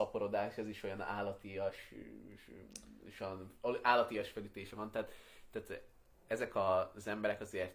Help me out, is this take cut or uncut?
uncut